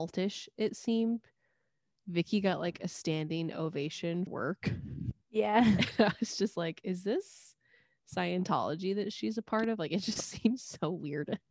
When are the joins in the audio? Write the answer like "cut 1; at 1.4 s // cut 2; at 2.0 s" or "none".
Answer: cut 1; at 4.3 s // cut 2; at 5.2 s